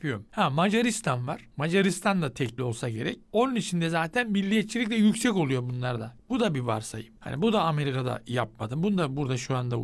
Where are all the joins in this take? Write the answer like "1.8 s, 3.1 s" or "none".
2.6 s